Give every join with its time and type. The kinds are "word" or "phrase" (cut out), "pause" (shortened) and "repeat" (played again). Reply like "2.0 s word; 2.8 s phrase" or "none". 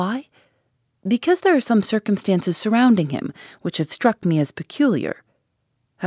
none